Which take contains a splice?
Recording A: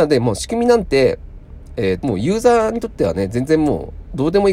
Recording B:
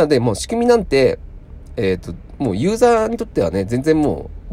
A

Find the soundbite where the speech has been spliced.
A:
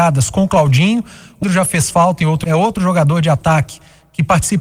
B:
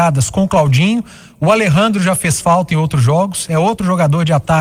A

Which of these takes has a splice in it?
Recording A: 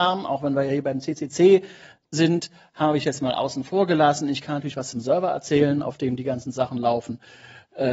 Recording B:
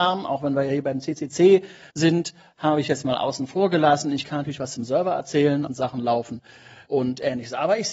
B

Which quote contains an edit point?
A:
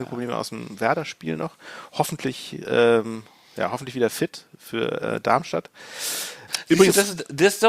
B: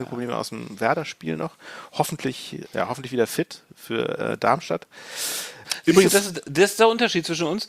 B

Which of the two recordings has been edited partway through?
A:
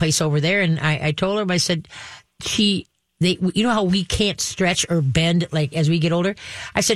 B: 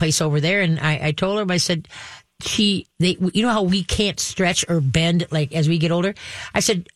B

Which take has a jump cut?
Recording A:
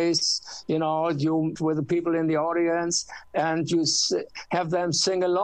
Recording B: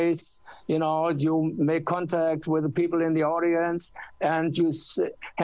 A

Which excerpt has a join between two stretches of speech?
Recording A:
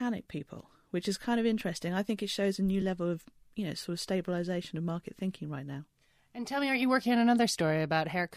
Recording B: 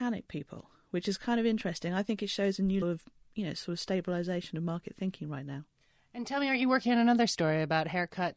B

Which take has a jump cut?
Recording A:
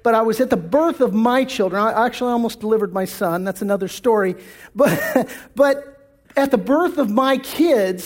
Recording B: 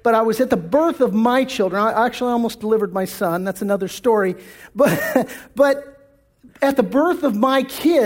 A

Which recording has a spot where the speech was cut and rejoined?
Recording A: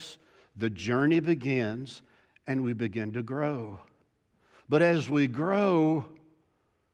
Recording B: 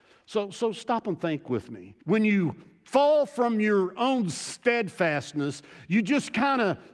B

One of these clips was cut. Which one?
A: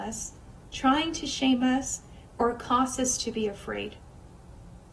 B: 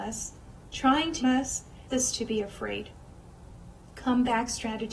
B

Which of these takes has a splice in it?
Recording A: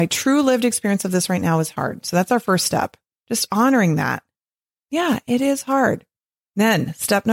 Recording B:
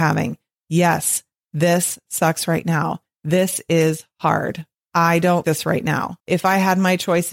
B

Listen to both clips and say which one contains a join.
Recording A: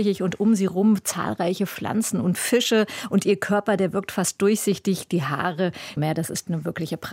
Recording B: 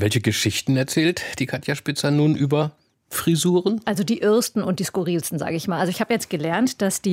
A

